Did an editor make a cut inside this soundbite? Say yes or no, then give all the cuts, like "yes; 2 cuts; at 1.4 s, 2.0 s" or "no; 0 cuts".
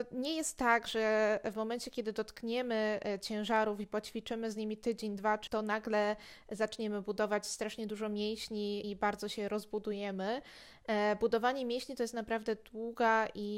yes; 2 cuts; at 5.5 s, 8.8 s